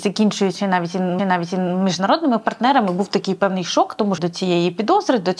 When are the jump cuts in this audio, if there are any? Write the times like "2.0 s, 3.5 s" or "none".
1.2 s, 4.2 s